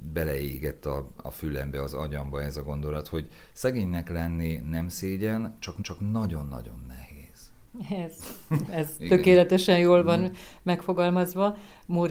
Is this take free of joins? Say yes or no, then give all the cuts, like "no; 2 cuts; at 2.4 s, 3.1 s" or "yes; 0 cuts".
no; 2 cuts; at 5.8 s, 8.7 s